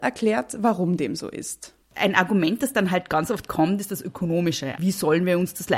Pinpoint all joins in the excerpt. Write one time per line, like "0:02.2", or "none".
0:01.8